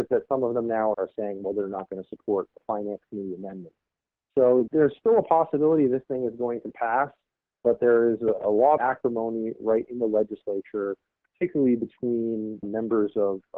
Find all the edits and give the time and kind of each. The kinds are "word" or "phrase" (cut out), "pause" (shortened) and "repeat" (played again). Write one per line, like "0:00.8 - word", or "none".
0:00.9 - word
0:08.8 - word
0:09.8 - word
0:12.6 - word